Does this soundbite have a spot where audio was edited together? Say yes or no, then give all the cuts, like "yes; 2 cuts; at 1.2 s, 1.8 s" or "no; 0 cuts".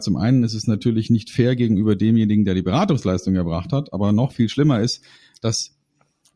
no; 0 cuts